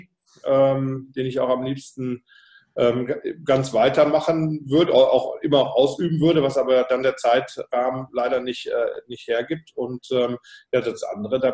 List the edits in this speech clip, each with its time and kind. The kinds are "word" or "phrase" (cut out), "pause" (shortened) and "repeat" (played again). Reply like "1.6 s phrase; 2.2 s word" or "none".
none